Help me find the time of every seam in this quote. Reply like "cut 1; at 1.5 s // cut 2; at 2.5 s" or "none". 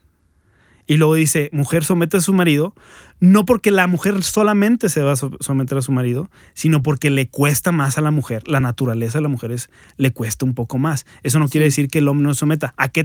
none